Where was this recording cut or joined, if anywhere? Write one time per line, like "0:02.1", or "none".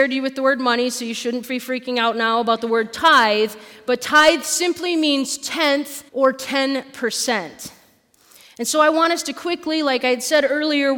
0:06.1